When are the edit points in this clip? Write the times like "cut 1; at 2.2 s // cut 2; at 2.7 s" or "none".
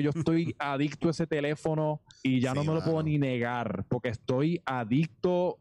cut 1; at 2.1 s